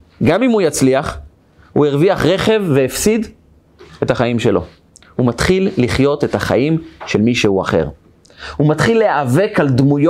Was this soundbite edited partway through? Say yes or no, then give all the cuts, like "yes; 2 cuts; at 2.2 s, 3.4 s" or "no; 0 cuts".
no; 0 cuts